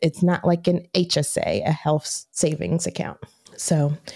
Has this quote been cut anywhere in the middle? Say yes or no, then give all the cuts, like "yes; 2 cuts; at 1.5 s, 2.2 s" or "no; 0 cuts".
no; 0 cuts